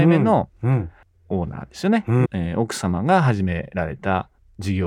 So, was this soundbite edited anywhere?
yes; 1 cut; at 2.2 s

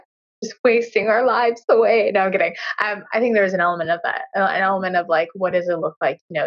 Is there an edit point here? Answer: no; 0 cuts

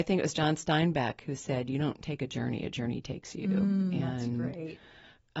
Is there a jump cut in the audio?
no; 0 cuts

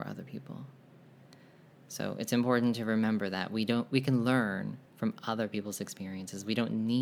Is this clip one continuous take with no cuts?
no; 1 cut; at 4.9 s

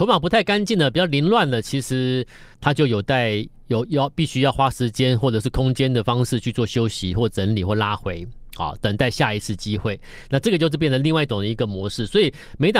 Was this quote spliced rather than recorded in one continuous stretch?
yes; 1 cut; at 2.5 s

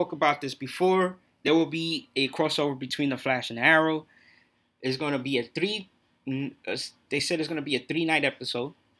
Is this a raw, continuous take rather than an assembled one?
yes; 0 cuts

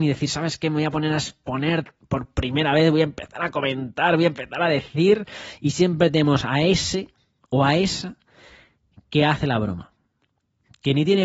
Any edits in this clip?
no; 0 cuts

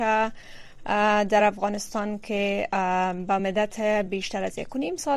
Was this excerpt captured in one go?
yes; 0 cuts

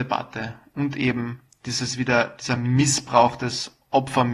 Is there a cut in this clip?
no; 0 cuts

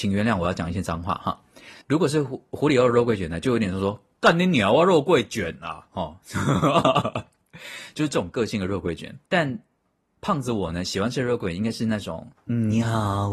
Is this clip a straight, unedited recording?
no; 2 cuts; at 1.8 s, 9.2 s

